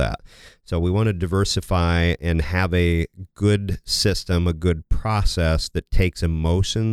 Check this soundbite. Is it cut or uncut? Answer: uncut